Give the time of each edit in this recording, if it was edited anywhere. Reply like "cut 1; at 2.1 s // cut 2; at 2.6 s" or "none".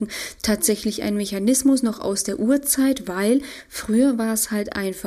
none